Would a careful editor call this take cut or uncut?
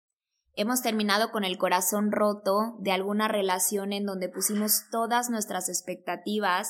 uncut